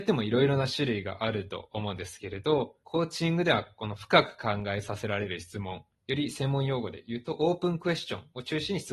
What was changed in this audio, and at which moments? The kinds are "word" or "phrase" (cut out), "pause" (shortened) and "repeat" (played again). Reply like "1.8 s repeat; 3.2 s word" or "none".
2.8 s pause; 5.9 s pause